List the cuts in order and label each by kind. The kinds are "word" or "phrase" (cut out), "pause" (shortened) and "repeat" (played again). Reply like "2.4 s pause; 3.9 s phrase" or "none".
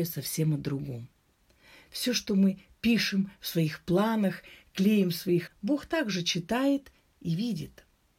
5.5 s word